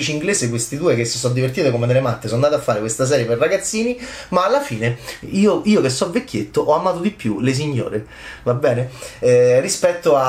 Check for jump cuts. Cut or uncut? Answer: uncut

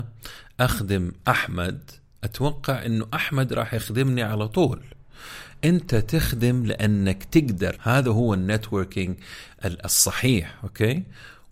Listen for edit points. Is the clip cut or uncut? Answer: cut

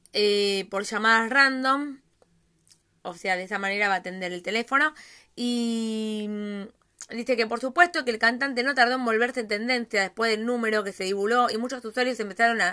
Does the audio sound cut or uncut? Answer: uncut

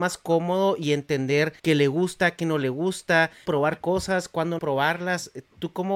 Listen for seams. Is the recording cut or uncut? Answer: cut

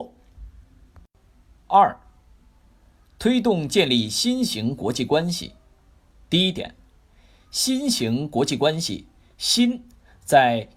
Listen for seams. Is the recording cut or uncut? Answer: uncut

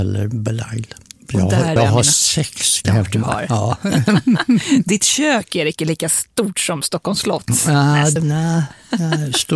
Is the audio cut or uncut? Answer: cut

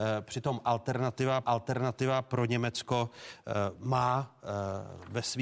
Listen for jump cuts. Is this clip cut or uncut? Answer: cut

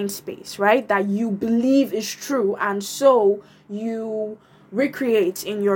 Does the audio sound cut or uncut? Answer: uncut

